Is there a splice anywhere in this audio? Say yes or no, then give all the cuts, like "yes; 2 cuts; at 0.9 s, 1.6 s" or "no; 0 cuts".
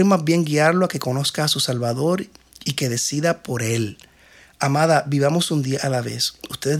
no; 0 cuts